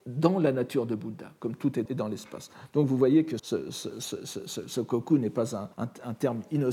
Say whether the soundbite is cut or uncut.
cut